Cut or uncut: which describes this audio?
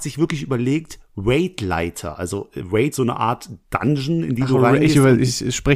cut